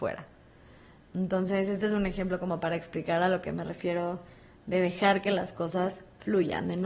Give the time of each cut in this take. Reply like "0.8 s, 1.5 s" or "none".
none